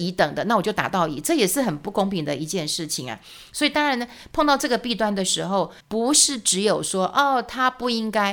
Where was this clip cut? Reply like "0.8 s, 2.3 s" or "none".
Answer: 5.8 s